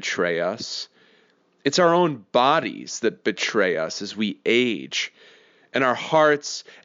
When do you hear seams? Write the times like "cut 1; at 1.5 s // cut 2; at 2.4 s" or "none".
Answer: none